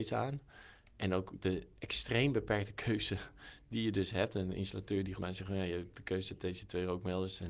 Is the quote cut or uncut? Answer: cut